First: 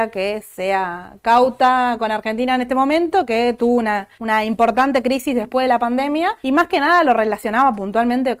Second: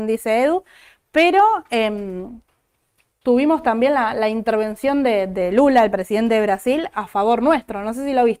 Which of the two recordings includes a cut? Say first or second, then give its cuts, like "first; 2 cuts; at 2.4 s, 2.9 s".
first; 2 cuts; at 4.1 s, 6.4 s